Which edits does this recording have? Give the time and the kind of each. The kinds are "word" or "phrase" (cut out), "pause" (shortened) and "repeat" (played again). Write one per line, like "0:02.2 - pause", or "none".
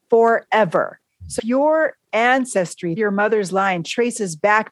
0:01.4 - word
0:03.0 - word

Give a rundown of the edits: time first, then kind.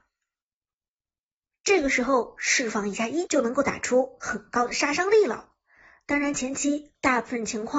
0:03.3 - phrase

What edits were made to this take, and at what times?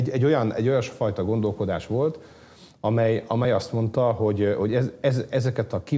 none

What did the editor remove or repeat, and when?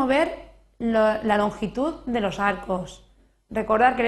none

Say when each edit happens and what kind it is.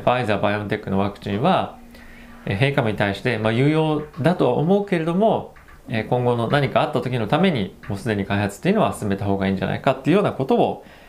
0:05.8 - pause

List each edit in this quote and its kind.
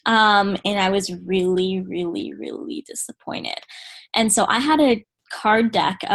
none

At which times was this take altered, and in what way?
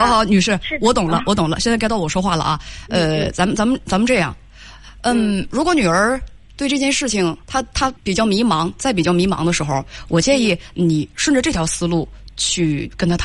0:07.4 - pause
0:08.0 - pause

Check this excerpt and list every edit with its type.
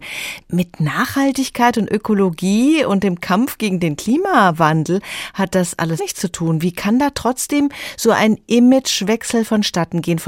0:06.0 - phrase

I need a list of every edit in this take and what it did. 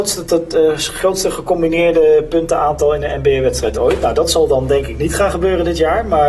none

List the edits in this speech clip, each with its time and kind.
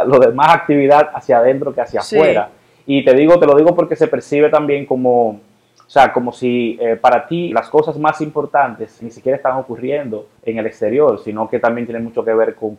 0:07.5 - word
0:09.0 - word
0:10.4 - pause

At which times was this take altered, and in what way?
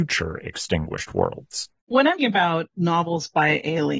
0:01.8 - pause
0:02.2 - word

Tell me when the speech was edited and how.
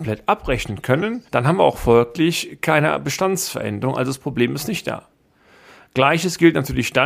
0:01.3 - pause

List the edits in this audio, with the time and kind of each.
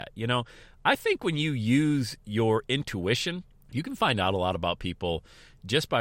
0:03.5 - pause

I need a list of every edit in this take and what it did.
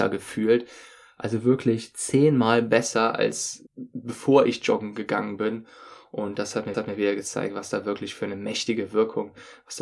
0:03.7 - pause
0:06.7 - repeat

